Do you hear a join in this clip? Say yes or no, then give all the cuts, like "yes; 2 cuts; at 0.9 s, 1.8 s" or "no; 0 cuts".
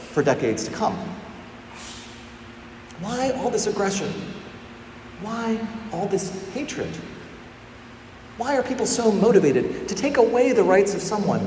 no; 0 cuts